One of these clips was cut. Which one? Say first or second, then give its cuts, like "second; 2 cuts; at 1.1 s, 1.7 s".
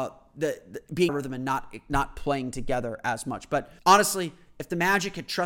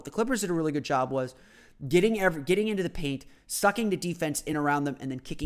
first; 2 cuts; at 1.1 s, 3.8 s